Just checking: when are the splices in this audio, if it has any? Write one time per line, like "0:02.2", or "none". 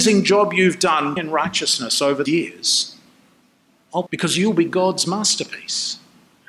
0:01.2
0:02.3
0:04.1